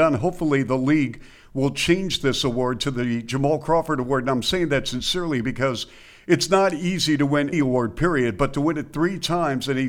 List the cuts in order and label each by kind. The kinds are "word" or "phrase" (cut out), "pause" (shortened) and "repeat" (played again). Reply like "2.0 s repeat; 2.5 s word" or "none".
7.5 s word